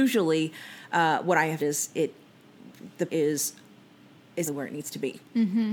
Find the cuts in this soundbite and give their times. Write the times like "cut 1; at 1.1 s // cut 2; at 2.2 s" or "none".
cut 1; at 1.6 s // cut 2; at 3.1 s // cut 3; at 4.5 s